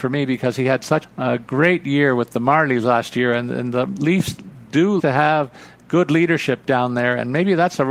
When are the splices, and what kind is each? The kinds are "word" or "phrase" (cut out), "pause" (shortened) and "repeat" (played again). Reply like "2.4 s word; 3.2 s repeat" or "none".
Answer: 1.0 s word; 5.0 s word